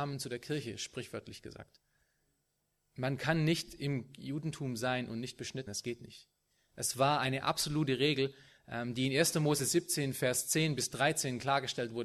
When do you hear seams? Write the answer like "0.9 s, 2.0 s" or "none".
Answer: 5.7 s